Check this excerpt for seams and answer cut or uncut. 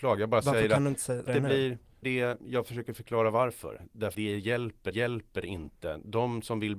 cut